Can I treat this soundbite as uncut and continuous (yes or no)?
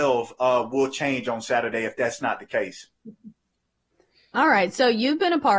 yes